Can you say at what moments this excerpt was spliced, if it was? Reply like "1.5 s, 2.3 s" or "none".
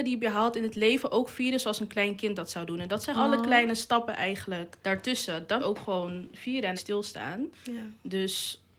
3.1 s, 4.8 s, 5.6 s, 6.8 s, 7.5 s